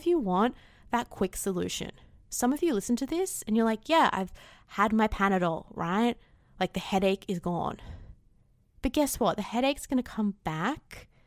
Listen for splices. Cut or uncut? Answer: uncut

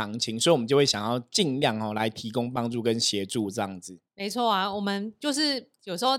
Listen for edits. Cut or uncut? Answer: cut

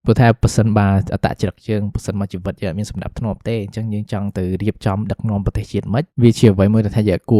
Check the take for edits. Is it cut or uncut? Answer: cut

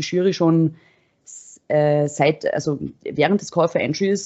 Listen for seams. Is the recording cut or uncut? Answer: uncut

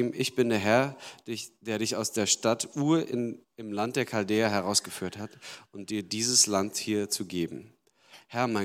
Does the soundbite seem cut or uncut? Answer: cut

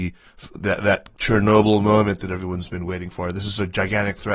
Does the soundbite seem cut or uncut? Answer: uncut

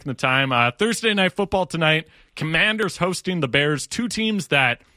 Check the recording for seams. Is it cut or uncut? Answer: uncut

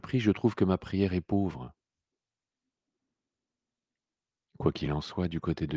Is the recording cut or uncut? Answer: uncut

